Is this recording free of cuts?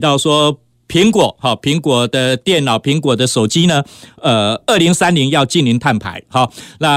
yes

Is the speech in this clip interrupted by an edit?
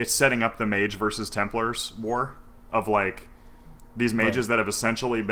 no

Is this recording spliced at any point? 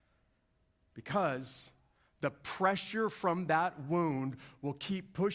no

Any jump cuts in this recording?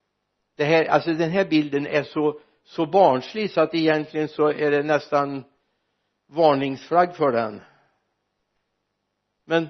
no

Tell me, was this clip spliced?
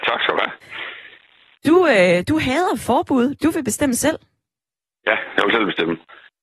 no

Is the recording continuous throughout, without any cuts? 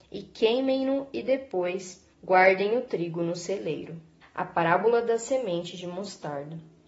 no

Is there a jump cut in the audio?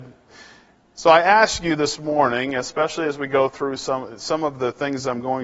no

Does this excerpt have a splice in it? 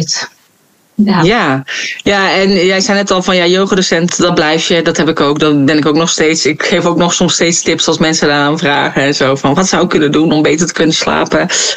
yes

